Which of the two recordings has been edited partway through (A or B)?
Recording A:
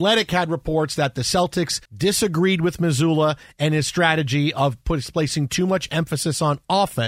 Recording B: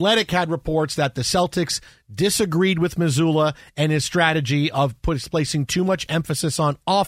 A